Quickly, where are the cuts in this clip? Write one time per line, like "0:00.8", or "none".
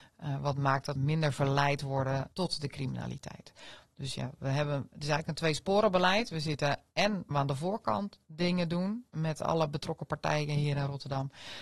0:01.0
0:02.3
0:07.3